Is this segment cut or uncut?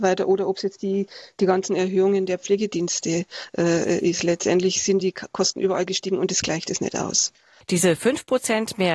uncut